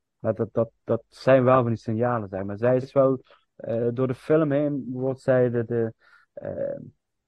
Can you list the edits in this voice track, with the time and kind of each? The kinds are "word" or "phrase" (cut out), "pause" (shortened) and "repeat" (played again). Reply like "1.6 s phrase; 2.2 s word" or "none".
2.8 s word